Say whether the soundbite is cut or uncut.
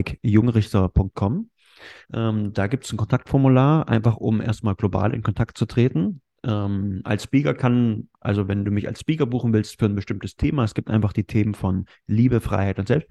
cut